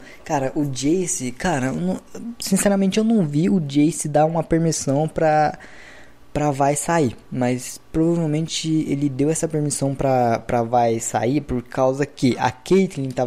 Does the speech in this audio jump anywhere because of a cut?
no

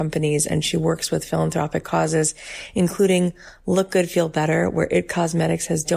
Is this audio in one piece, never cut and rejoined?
yes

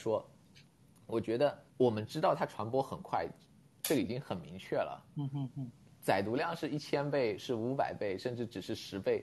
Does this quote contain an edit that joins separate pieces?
yes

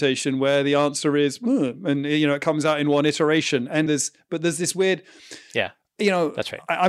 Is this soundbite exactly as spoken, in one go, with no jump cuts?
no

